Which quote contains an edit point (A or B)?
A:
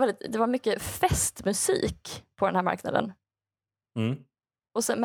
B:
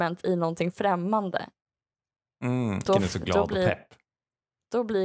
B